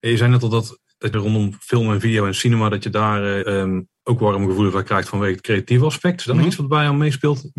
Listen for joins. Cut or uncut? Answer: cut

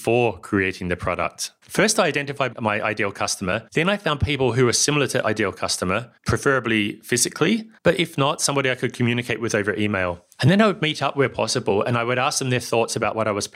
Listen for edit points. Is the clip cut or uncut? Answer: cut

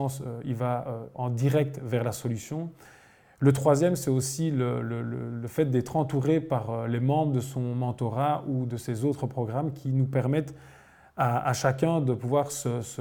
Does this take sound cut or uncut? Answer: uncut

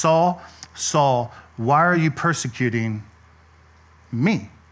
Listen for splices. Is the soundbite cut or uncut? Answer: uncut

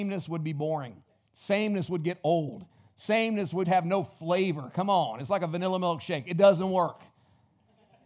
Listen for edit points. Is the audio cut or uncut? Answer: cut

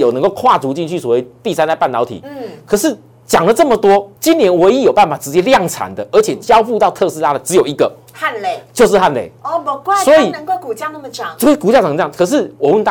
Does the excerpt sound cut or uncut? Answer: cut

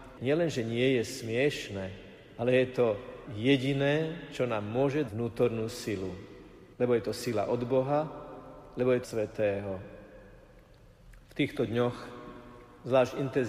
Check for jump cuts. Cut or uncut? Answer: cut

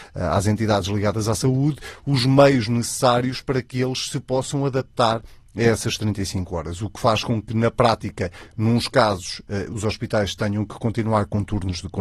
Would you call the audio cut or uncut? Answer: uncut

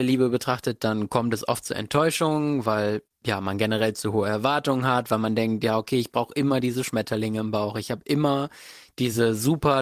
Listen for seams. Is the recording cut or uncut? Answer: uncut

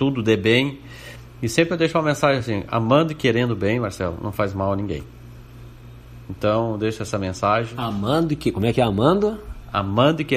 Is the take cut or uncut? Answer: uncut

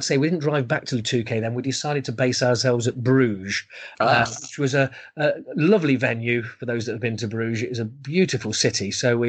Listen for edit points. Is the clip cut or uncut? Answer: uncut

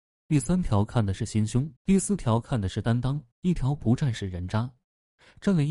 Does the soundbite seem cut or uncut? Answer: cut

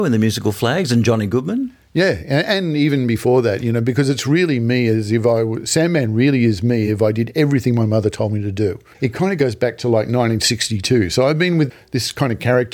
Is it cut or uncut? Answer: uncut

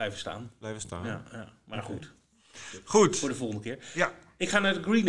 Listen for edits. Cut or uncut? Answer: uncut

